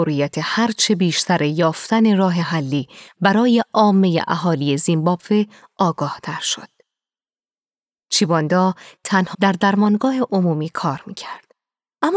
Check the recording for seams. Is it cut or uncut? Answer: cut